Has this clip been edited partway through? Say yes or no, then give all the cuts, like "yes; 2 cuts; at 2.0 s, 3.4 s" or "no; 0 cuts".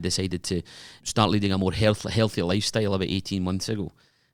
no; 0 cuts